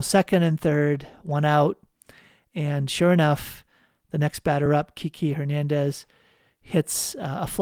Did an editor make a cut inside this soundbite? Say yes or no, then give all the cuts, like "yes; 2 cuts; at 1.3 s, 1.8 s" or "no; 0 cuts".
no; 0 cuts